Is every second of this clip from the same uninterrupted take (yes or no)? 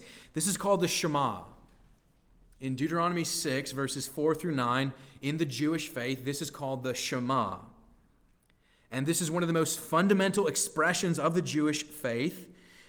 yes